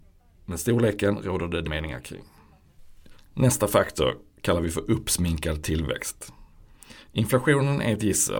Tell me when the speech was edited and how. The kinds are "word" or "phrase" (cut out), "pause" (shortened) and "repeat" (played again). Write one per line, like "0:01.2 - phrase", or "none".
0:01.6 - word